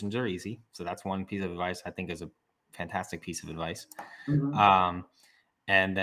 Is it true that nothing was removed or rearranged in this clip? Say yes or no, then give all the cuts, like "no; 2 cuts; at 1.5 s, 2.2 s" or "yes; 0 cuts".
yes; 0 cuts